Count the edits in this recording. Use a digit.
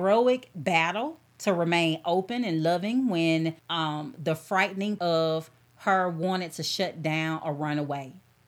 2